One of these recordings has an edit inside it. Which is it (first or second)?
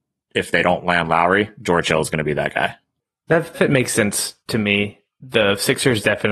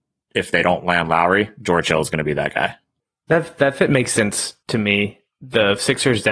first